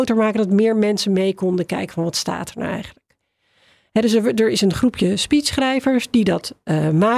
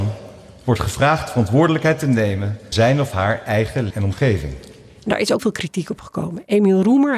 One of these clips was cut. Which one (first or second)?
second